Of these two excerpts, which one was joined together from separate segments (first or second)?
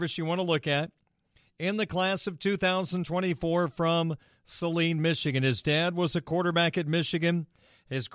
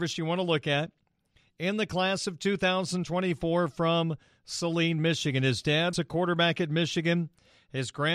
second